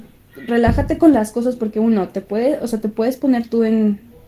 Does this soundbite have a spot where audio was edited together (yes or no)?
no